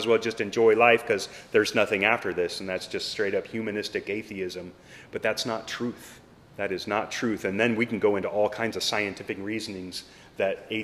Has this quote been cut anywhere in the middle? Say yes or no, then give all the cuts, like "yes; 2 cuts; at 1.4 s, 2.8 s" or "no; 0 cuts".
yes; 1 cut; at 6.4 s